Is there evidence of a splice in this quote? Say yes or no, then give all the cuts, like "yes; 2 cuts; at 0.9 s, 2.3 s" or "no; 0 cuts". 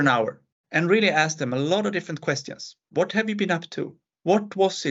no; 0 cuts